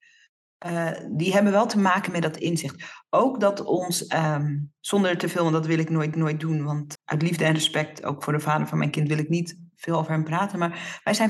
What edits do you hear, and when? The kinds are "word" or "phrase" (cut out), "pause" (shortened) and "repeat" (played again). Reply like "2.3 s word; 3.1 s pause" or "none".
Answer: 4.8 s pause; 6.1 s repeat; 6.9 s word